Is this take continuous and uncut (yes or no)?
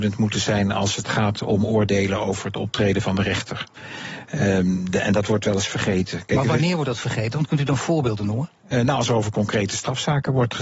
no